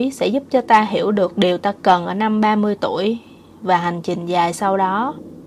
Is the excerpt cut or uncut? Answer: uncut